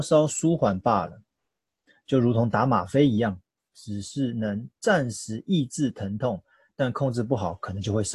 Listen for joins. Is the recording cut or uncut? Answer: uncut